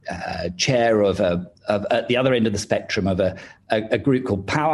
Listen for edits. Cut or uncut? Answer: uncut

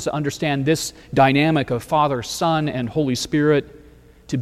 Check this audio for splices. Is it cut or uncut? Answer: uncut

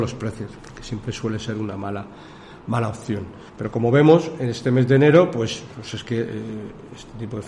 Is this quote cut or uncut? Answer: cut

